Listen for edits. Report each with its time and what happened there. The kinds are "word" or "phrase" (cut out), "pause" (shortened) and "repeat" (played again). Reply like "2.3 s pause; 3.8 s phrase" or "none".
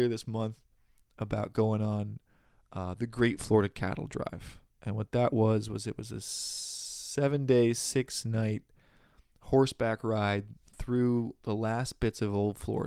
none